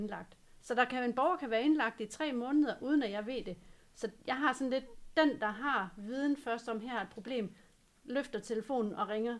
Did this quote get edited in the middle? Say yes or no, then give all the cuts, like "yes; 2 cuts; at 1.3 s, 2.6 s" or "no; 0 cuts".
no; 0 cuts